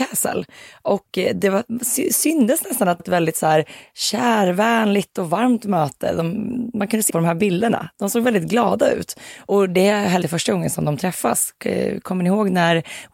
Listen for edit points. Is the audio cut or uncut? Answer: cut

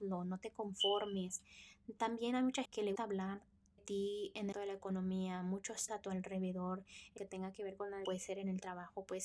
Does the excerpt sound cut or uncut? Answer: cut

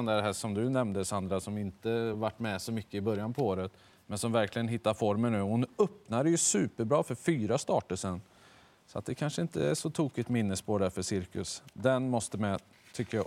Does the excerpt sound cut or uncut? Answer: uncut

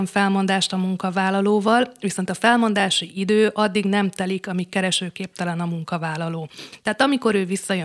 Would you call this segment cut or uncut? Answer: uncut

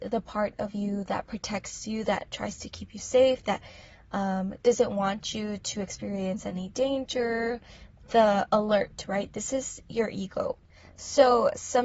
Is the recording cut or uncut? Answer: uncut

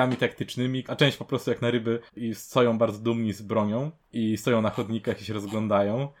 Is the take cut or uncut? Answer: cut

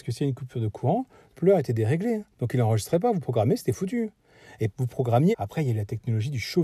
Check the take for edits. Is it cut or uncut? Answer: cut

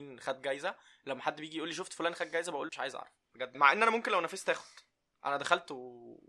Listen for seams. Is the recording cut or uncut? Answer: cut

